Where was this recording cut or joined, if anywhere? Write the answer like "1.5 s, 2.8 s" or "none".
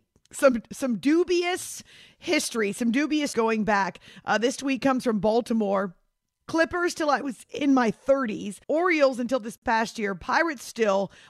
3.3 s, 8.6 s